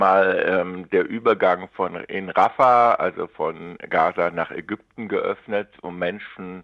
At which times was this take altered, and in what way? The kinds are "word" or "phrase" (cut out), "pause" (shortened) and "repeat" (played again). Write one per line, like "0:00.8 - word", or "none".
none